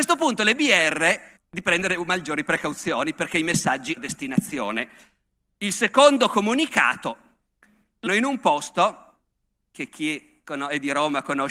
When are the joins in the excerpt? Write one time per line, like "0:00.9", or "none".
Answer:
0:01.4
0:04.0
0:08.1